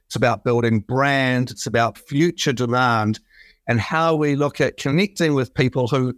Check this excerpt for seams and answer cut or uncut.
cut